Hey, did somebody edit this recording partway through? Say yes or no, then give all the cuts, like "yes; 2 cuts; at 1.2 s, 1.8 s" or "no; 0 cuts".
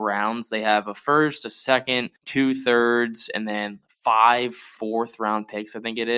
yes; 1 cut; at 2.2 s